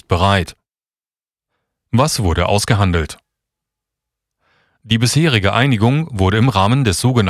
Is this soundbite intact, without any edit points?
yes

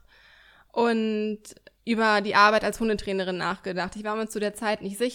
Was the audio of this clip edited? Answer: no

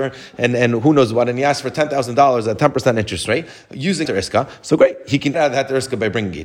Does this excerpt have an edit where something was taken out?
yes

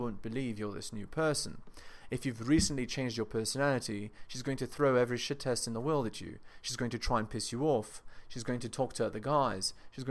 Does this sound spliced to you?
no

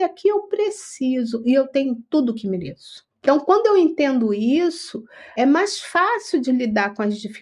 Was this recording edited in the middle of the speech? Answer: yes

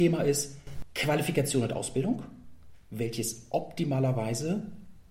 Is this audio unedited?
yes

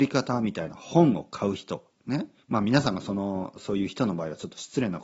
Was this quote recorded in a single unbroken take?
no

